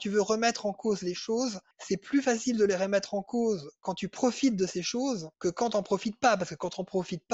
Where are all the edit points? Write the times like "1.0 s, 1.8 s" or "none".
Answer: 1.7 s, 5.3 s